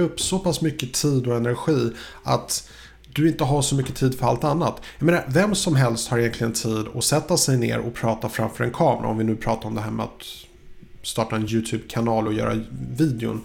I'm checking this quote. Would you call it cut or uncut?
uncut